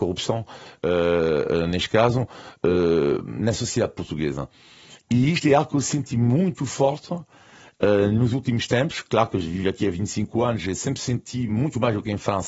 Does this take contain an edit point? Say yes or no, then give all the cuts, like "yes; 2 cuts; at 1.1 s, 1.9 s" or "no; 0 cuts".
no; 0 cuts